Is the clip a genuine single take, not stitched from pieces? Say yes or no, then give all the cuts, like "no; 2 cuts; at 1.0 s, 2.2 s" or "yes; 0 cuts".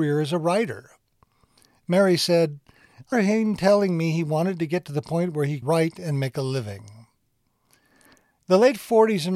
no; 2 cuts; at 3.1 s, 5.6 s